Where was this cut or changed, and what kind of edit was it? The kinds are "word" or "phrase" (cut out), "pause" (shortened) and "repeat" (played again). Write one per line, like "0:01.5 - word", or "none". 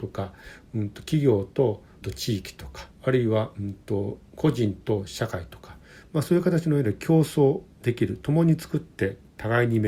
0:02.0 - phrase
0:02.9 - pause